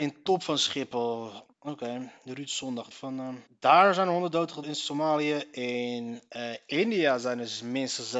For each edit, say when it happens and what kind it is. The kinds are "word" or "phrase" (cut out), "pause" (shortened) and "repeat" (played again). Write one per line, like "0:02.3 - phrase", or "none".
0:01.5 - pause
0:02.9 - word
0:03.5 - pause
0:04.6 - word